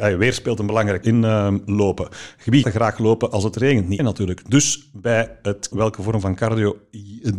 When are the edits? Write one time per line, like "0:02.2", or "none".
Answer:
0:01.0
0:02.6
0:04.0
0:05.7